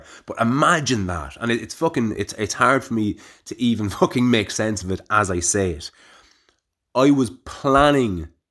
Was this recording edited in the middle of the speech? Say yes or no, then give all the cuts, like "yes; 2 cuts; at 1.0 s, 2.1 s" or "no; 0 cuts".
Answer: no; 0 cuts